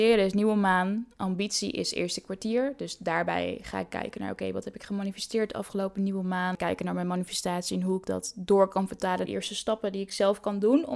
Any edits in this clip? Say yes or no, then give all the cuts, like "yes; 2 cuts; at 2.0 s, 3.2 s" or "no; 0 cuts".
yes; 1 cut; at 9.2 s